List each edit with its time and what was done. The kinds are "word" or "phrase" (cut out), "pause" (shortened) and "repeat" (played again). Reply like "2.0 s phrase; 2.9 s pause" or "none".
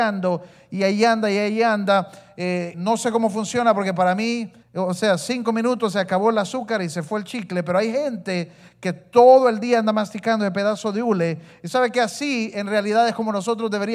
2.7 s word; 4.6 s pause